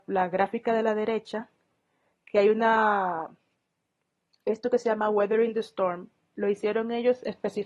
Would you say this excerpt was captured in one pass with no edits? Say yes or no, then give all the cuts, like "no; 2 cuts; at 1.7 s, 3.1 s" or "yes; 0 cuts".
yes; 0 cuts